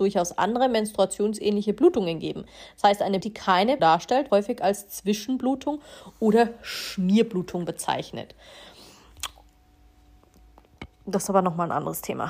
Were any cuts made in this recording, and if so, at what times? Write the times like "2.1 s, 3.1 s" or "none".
3.2 s, 3.8 s, 4.3 s